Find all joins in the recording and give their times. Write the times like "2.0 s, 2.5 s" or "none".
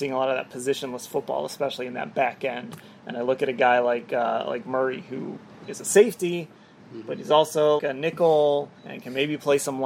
7.8 s, 8.8 s